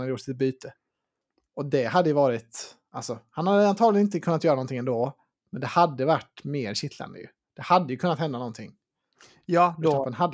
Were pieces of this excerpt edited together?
no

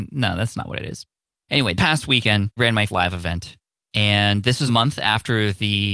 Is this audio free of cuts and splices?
no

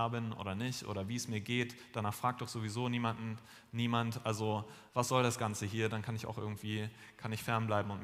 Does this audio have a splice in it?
yes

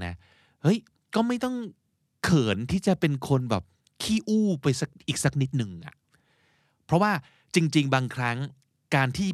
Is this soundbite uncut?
yes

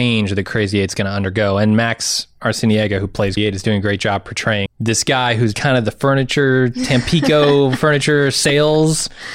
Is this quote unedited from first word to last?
no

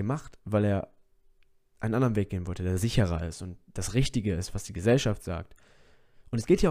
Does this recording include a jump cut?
no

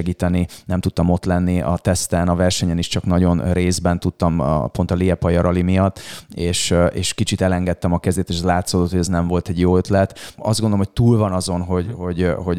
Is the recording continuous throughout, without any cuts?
yes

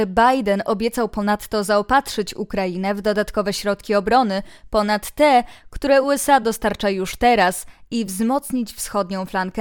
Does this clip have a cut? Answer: no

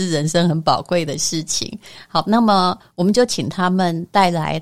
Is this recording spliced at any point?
no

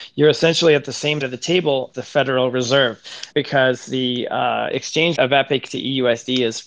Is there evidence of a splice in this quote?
yes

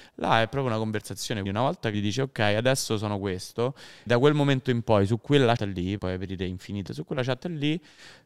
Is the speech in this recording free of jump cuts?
no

